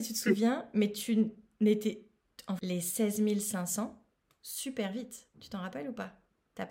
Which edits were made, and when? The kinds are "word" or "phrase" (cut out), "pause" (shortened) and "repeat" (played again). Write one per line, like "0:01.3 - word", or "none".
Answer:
0:02.6 - phrase